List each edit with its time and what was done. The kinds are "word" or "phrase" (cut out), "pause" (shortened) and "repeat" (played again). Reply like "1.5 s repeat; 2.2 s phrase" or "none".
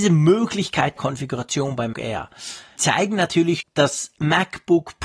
1.0 s word; 1.9 s word; 2.8 s word; 3.6 s word